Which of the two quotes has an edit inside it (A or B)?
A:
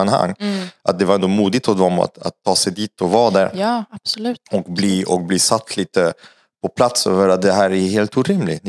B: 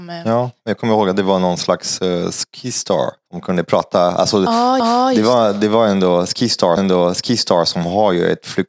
B